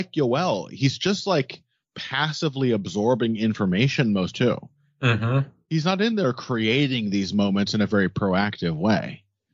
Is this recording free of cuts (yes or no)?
no